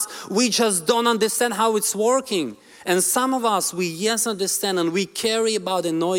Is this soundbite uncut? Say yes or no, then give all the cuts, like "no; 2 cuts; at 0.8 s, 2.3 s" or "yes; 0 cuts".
yes; 0 cuts